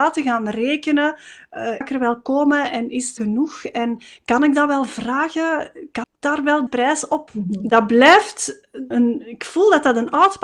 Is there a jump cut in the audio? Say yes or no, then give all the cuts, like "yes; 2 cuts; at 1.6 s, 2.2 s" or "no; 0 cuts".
yes; 6 cuts; at 1.8 s, 3.2 s, 6.0 s, 6.7 s, 7.3 s, 8.9 s